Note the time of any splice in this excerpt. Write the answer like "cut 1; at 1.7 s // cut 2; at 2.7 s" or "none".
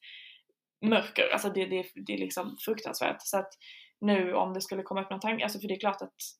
none